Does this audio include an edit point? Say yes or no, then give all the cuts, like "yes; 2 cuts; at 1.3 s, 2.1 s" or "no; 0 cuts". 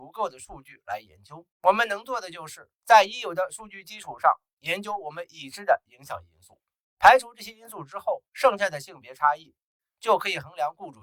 yes; 4 cuts; at 1.5 s, 2.8 s, 6.8 s, 8.3 s